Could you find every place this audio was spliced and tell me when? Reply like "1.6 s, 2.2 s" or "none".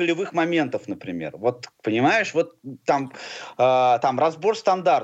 1.7 s